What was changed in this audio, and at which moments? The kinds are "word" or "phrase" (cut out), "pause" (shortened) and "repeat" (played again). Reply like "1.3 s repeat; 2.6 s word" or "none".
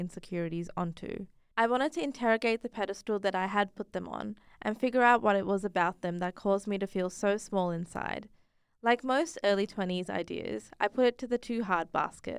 none